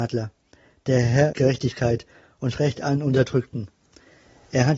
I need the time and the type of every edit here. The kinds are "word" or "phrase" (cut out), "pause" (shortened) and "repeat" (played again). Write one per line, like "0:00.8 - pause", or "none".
0:01.3 - word
0:02.5 - word